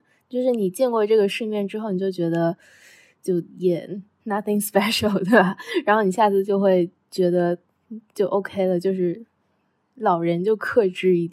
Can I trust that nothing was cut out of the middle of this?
yes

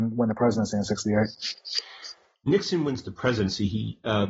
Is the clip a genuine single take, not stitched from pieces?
yes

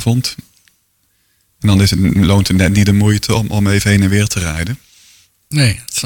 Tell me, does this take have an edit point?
no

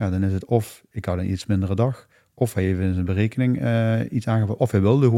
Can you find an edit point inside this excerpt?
no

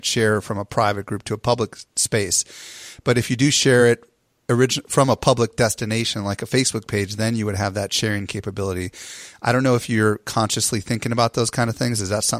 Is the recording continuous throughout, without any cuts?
yes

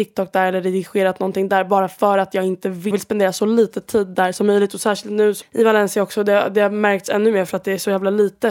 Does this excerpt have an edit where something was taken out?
yes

